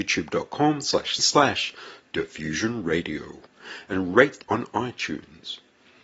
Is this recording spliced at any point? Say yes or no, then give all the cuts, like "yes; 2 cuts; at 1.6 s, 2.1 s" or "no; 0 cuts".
yes; 2 cuts; at 1.2 s, 4.4 s